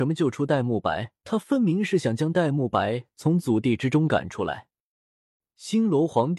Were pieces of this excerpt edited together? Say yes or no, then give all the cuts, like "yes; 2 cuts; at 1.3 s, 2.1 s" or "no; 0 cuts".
yes; 1 cut; at 1.2 s